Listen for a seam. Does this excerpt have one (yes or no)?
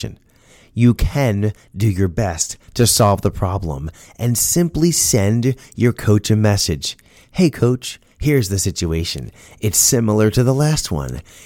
no